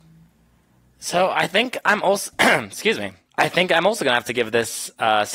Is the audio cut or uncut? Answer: cut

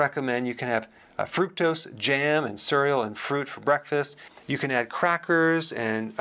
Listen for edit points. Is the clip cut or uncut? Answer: uncut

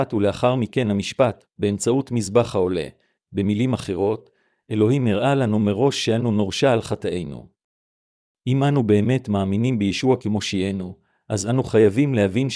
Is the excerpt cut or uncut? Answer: uncut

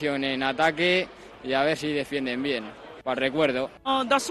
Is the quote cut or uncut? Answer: uncut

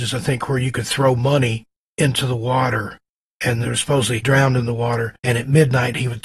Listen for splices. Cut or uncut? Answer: cut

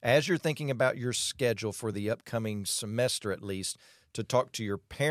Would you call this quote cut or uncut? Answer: uncut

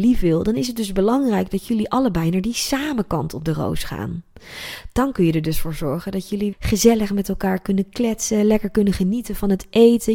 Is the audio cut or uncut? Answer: cut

